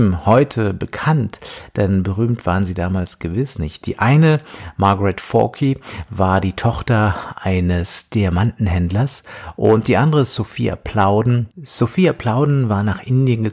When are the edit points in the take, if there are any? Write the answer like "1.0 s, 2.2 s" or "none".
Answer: 11.5 s